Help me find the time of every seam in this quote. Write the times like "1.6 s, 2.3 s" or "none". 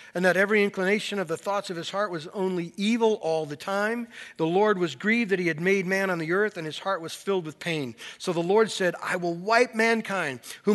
none